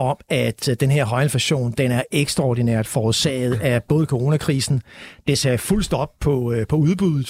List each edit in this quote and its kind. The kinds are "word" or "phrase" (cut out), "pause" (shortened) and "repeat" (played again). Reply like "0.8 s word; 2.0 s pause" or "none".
none